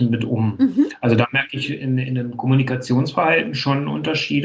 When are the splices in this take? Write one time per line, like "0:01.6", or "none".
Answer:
none